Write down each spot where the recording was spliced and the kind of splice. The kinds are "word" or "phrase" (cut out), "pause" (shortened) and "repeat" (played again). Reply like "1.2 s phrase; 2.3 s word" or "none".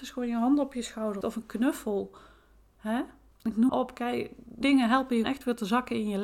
1.2 s word; 3.3 s pause; 3.7 s word; 4.6 s word; 5.2 s word